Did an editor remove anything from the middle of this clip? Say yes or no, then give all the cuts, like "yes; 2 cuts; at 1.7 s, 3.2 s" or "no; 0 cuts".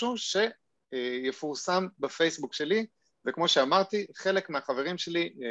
no; 0 cuts